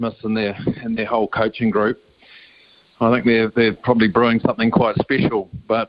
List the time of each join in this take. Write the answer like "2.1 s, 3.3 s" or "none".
none